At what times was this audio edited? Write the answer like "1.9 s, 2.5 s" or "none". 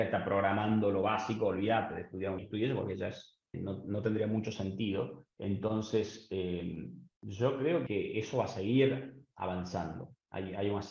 2.4 s, 3.5 s, 5.3 s, 7.1 s, 7.9 s